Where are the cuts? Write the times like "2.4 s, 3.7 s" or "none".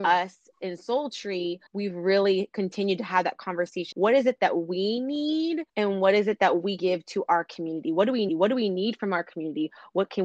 1.7 s, 3.9 s, 5.7 s, 6.8 s, 8.3 s